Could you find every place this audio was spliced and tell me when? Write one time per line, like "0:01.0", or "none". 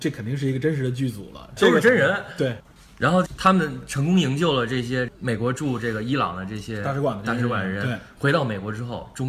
0:01.6